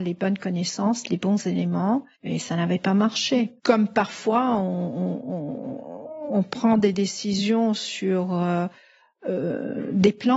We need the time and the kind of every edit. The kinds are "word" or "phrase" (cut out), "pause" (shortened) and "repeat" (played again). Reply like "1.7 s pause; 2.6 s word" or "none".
2.1 s pause; 3.6 s pause